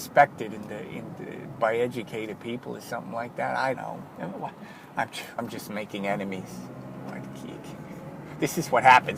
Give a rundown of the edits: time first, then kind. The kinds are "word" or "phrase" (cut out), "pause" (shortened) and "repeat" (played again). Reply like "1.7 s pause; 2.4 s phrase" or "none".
3.7 s word; 5.4 s word